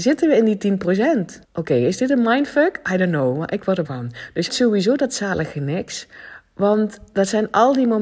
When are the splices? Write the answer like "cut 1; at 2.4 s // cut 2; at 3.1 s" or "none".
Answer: cut 1; at 1.4 s // cut 2; at 3.8 s // cut 3; at 4.5 s